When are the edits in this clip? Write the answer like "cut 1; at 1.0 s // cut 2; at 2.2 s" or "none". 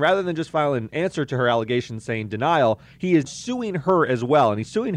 cut 1; at 3.3 s